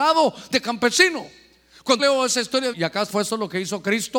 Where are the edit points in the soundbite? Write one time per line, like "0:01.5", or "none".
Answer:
0:02.0
0:02.7
0:03.1